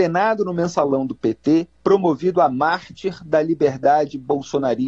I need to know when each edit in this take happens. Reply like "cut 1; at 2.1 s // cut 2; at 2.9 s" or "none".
cut 1; at 1.8 s